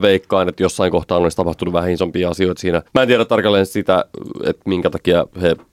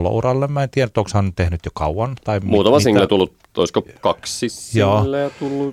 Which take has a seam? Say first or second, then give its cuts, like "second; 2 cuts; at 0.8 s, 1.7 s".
first; 1 cut; at 2.9 s